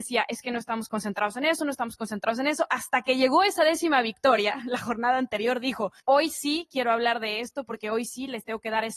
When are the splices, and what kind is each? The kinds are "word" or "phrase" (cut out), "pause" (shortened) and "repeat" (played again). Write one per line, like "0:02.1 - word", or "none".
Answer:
0:06.0 - pause